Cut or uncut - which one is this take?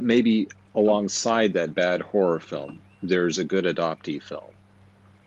uncut